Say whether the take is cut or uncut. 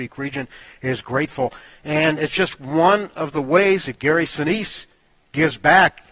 cut